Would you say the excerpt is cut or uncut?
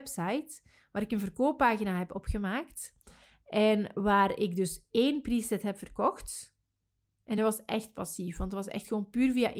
uncut